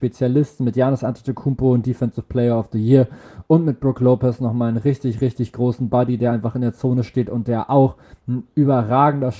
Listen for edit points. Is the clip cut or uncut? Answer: uncut